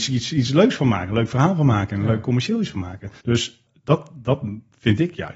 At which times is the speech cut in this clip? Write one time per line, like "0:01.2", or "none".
0:03.2